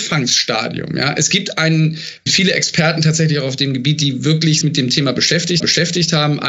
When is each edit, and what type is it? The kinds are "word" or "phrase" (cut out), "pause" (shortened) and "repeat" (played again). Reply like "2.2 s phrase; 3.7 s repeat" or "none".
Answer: 2.3 s word; 4.6 s phrase; 5.6 s repeat